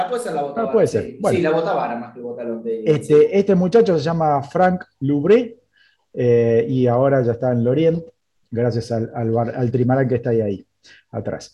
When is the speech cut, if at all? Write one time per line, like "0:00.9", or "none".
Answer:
none